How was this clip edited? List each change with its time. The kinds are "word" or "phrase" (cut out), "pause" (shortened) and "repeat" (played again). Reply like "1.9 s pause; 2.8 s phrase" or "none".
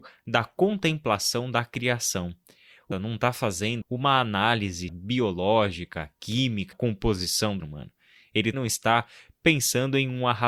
2.9 s word; 3.8 s word; 4.9 s word; 6.7 s word; 7.6 s word; 8.5 s word